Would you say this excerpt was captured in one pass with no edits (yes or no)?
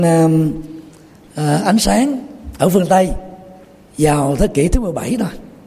yes